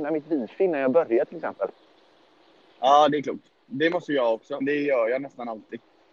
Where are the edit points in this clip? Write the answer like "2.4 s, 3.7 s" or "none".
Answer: 4.6 s